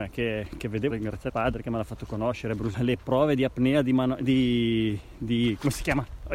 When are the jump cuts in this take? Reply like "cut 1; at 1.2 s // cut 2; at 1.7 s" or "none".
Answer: cut 1; at 0.9 s // cut 2; at 1.3 s // cut 3; at 2.7 s

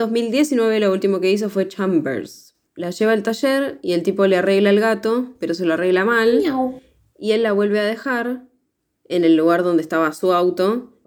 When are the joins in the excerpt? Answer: none

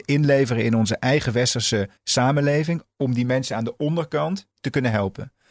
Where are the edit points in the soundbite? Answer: cut 1; at 2.0 s // cut 2; at 4.5 s

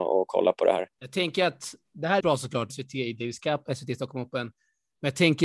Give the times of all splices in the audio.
cut 1; at 0.9 s // cut 2; at 2.2 s // cut 3; at 2.7 s

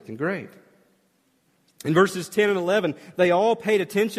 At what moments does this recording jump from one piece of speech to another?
none

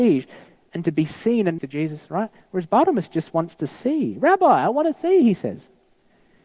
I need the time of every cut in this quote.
cut 1; at 1.6 s

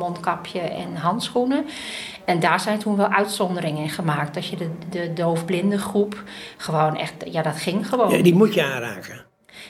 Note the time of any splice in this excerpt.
none

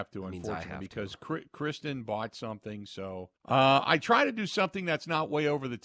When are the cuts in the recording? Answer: cut 1; at 3.4 s

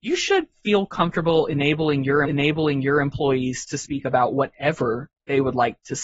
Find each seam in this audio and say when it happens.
cut 1; at 2.2 s

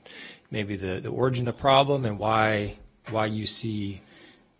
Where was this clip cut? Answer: none

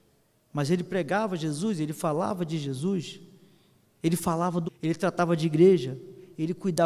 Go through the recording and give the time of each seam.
cut 1; at 4.6 s

